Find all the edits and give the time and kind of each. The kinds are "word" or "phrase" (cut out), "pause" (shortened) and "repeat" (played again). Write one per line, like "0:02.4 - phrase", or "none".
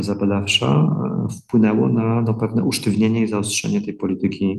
none